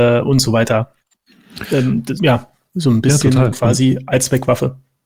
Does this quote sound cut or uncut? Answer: cut